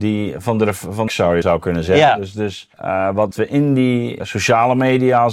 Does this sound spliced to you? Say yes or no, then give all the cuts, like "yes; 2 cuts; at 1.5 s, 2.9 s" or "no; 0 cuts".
yes; 5 cuts; at 1.1 s, 1.4 s, 2.7 s, 3.3 s, 4.2 s